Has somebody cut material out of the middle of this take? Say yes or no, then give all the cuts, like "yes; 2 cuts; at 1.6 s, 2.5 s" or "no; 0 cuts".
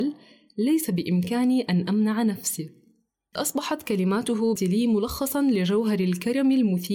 yes; 2 cuts; at 3.4 s, 4.6 s